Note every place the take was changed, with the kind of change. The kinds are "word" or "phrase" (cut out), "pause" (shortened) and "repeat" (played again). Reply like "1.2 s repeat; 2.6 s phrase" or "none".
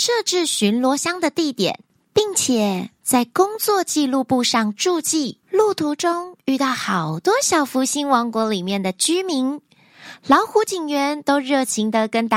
1.9 s pause; 5.4 s pause